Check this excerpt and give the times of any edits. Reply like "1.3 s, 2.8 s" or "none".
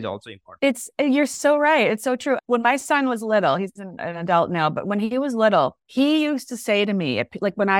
5.8 s